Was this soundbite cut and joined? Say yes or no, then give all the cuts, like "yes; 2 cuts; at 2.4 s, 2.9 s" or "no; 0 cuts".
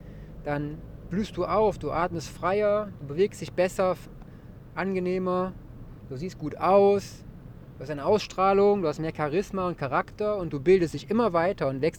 no; 0 cuts